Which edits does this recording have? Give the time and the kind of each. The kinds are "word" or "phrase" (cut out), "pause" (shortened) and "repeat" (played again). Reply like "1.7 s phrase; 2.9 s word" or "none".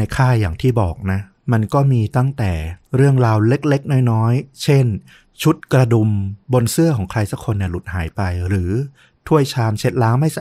2.8 s pause; 5.6 s pause; 6.4 s pause

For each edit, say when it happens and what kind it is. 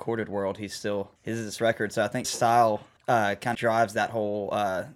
1.2 s pause; 1.6 s word; 2.2 s word; 3.0 s pause; 3.5 s word

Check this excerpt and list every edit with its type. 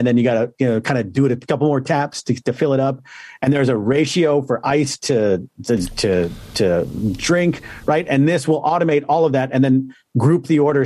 none

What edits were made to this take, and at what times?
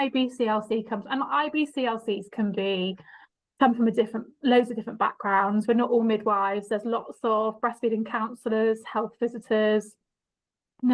none

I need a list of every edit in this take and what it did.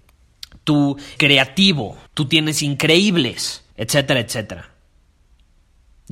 1.2 s word; 2.1 s pause; 2.6 s word; 3.7 s pause

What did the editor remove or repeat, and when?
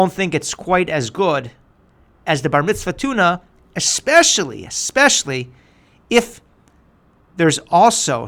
none

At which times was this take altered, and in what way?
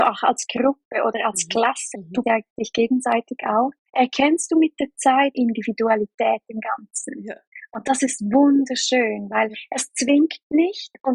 1.9 s word; 2.2 s word; 5.3 s phrase

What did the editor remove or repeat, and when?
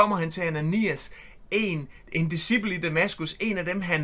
none

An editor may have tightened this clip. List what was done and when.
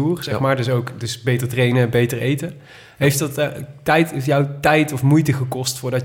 none

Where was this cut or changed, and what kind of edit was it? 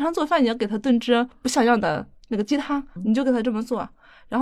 3.0 s word

